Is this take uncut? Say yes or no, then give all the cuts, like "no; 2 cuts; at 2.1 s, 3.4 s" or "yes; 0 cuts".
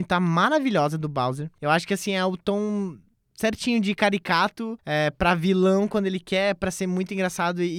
yes; 0 cuts